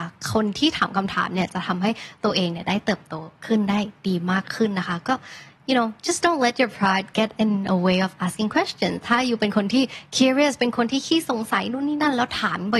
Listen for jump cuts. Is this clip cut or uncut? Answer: cut